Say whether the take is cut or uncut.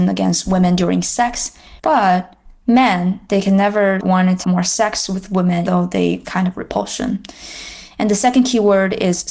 cut